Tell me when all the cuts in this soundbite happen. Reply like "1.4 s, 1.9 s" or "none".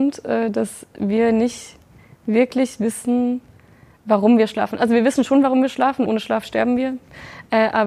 6.1 s